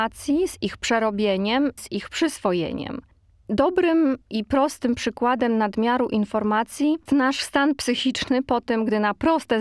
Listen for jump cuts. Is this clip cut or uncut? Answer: cut